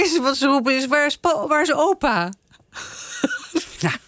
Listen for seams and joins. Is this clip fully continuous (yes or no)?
yes